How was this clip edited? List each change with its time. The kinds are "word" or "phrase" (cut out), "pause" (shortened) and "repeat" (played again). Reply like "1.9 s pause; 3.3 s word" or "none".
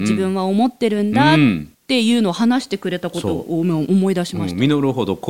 1.7 s pause

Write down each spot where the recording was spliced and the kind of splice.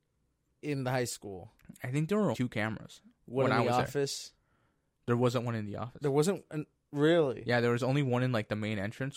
2.3 s word

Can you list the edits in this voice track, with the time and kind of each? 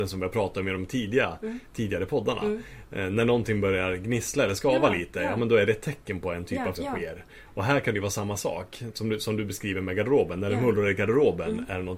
6.7 s word

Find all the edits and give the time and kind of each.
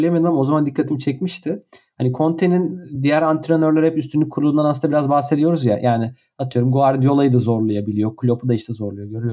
none

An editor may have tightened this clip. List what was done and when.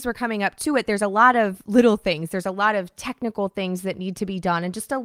none

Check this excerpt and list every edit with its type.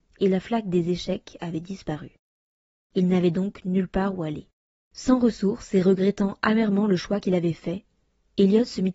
none

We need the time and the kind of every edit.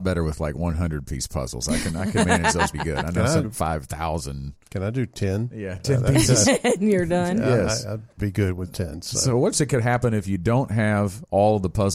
2.7 s word; 3.4 s phrase; 8.2 s word; 9.5 s phrase

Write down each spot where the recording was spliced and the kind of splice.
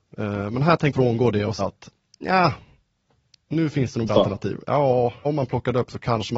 0.9 s word; 1.6 s word; 4.1 s word; 5.2 s word

